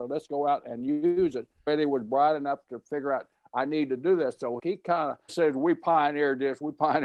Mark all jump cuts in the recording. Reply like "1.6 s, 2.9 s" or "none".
1.7 s, 4.6 s, 5.3 s